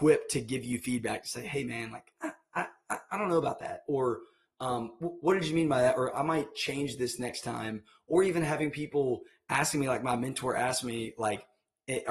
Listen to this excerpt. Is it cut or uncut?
uncut